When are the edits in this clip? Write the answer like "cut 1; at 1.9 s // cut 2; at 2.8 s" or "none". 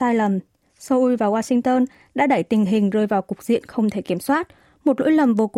none